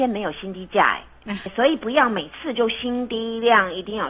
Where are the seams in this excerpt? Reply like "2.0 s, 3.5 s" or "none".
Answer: 1.5 s